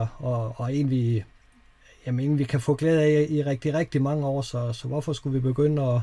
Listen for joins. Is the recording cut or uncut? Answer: uncut